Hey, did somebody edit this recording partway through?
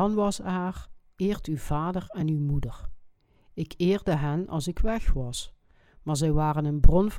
no; 0 cuts

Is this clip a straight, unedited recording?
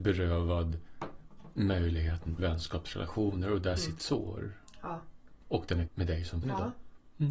no; 4 cuts; at 2.4 s, 4.0 s, 5.9 s, 6.4 s

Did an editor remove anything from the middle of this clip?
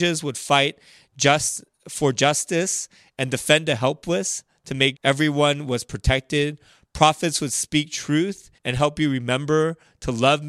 yes; 2 cuts; at 5.0 s, 8.6 s

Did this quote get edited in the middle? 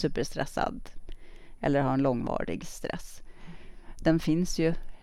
no; 0 cuts

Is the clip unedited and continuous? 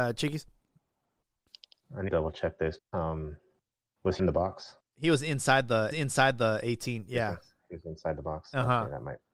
no; 6 cuts; at 2.1 s, 2.8 s, 3.7 s, 4.2 s, 4.8 s, 5.9 s

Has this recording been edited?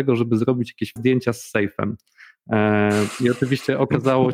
yes; 1 cut; at 1.0 s

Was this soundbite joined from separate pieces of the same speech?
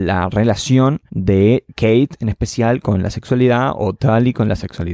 yes; 1 cut; at 1.1 s

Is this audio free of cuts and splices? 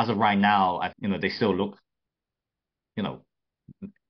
no; 1 cut; at 0.9 s

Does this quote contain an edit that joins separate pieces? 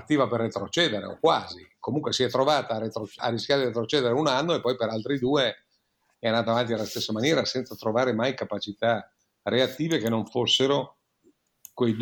yes; 1 cut; at 3.2 s

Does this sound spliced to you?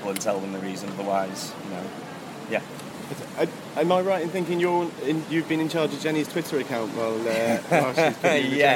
no; 0 cuts

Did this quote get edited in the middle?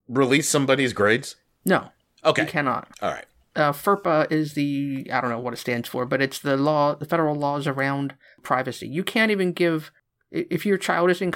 yes; 1 cut; at 2.9 s

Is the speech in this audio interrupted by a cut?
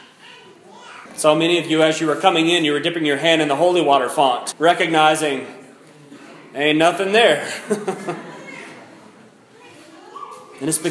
yes; 2 cuts; at 1.1 s, 4.5 s

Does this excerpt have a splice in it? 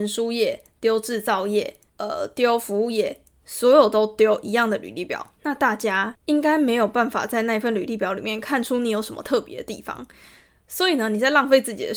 no; 0 cuts

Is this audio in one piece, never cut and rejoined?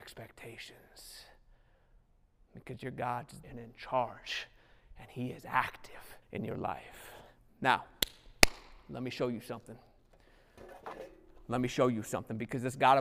no; 2 cuts; at 3.4 s, 6.2 s

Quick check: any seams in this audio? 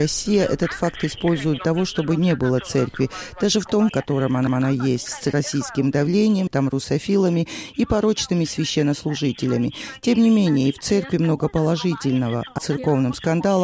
yes; 6 cuts; at 1.6 s, 3.9 s, 4.5 s, 6.5 s, 10.8 s, 12.6 s

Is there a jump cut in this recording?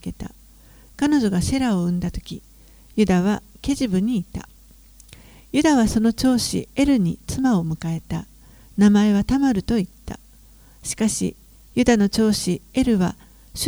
no; 0 cuts

